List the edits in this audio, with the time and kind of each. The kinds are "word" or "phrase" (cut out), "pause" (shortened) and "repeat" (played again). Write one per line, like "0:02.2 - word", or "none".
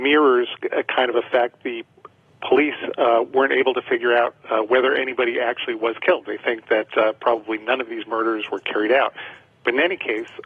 none